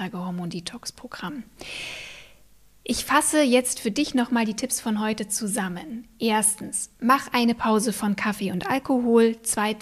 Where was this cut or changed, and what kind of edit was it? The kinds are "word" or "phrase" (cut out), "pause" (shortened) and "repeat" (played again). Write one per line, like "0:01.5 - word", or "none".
none